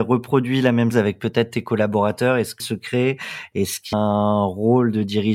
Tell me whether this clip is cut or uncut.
cut